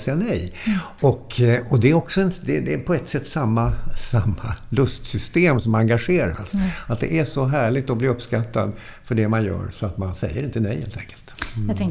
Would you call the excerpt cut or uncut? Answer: uncut